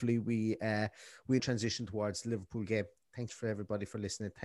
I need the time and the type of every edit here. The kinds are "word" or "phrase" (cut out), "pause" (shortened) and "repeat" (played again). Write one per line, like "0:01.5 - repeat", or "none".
0:01.4 - word
0:03.3 - phrase